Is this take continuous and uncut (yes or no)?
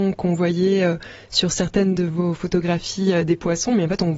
yes